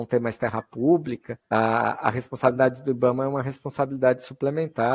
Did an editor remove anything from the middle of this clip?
yes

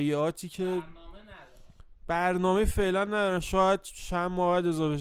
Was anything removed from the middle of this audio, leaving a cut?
no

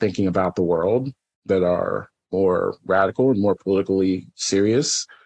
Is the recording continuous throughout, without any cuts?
yes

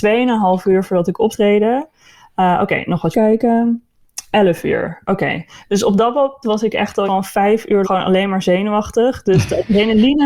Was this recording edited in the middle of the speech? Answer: yes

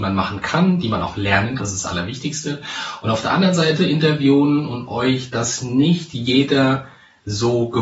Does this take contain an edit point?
yes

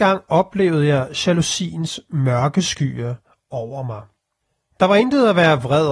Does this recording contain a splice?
no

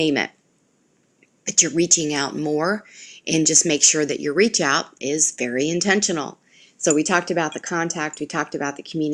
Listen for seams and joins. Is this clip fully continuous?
yes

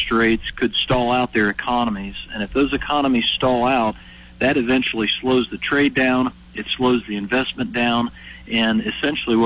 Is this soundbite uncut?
yes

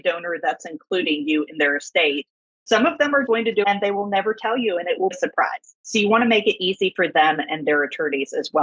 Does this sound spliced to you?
yes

